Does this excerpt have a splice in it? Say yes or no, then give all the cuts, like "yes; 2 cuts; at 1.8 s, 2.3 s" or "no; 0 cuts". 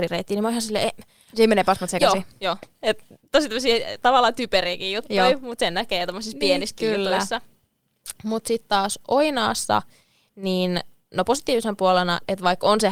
no; 0 cuts